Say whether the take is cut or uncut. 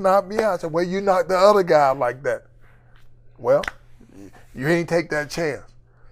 uncut